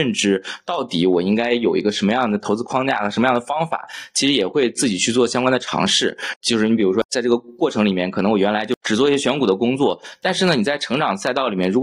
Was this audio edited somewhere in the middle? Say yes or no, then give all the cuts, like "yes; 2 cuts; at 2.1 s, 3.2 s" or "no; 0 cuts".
no; 0 cuts